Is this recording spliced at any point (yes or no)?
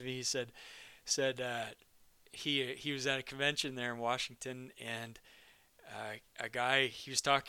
no